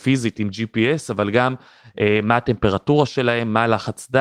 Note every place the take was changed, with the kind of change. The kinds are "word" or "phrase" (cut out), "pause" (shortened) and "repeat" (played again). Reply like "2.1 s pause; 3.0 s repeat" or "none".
none